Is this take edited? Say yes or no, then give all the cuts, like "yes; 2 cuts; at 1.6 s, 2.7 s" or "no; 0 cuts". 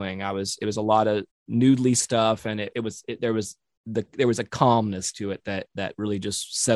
yes; 2 cuts; at 1.3 s, 2.7 s